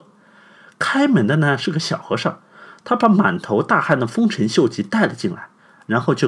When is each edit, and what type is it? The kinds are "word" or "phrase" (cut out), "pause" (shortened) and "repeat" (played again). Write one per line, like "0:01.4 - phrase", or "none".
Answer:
none